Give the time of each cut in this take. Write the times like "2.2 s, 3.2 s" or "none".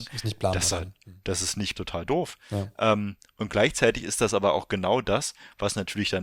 1.7 s